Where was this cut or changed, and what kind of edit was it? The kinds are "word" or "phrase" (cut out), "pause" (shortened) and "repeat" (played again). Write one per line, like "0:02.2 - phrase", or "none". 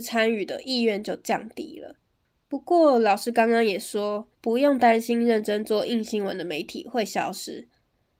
0:04.3 - pause